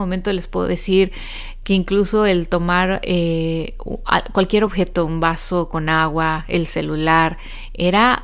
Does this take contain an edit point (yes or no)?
no